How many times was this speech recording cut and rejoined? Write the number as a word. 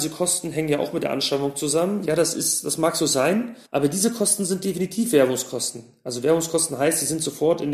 one